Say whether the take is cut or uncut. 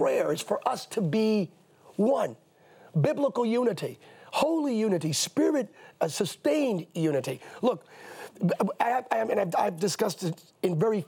uncut